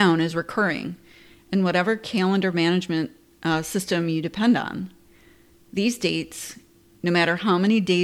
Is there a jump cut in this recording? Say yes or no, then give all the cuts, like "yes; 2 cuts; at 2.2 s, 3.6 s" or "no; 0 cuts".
no; 0 cuts